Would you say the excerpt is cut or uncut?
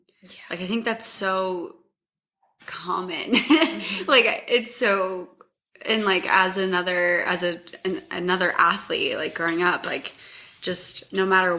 uncut